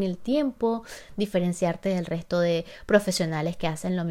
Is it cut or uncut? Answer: uncut